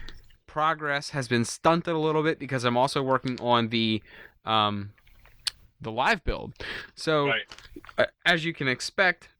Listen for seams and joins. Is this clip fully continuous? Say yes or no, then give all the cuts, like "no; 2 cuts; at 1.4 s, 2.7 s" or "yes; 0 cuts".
yes; 0 cuts